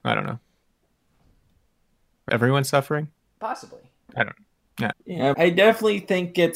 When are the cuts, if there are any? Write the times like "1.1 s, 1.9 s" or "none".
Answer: 2.3 s, 3.2 s, 4.9 s, 5.3 s